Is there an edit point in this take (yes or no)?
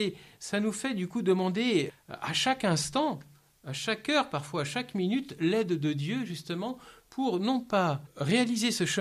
no